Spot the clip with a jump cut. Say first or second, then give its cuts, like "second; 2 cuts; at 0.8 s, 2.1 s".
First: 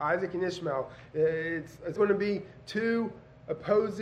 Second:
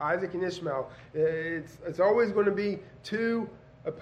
first; 1 cut; at 2.0 s